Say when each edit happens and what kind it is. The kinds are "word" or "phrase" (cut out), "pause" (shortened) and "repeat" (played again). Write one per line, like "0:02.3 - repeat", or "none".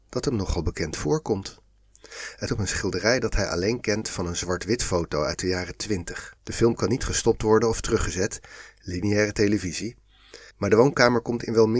0:02.5 - word
0:06.4 - pause
0:10.5 - pause